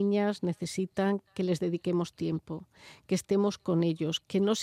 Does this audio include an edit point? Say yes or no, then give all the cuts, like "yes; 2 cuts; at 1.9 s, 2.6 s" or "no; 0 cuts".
no; 0 cuts